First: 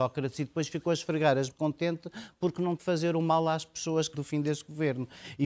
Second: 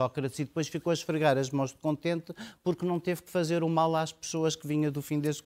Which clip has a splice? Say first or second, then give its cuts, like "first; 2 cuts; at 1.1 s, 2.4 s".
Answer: first; 3 cuts; at 1.5 s, 2.8 s, 4.1 s